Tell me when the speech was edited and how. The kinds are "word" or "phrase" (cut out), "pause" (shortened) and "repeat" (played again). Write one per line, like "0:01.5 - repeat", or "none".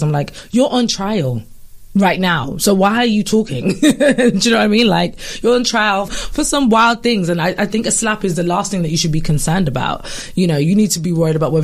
0:06.1 - word

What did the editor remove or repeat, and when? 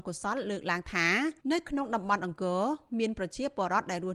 0:01.4 - pause

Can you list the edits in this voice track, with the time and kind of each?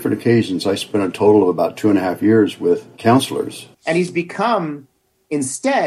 0:03.7 - pause

